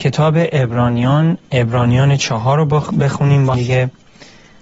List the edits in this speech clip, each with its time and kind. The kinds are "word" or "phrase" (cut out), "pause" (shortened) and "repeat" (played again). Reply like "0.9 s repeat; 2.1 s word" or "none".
1.4 s pause; 3.5 s word